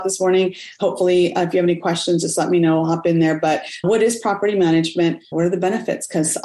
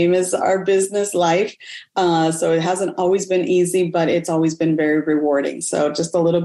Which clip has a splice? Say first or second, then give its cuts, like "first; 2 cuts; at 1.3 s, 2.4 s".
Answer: first; 2 cuts; at 3.8 s, 5.3 s